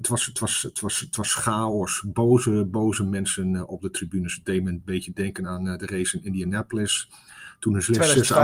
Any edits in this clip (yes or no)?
no